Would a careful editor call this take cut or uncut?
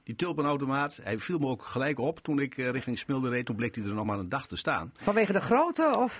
uncut